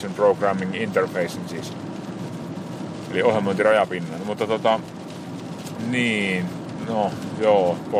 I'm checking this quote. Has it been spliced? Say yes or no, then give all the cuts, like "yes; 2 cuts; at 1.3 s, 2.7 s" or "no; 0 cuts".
no; 0 cuts